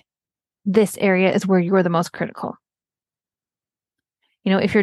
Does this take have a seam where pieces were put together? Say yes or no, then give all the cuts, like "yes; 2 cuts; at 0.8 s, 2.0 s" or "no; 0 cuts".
no; 0 cuts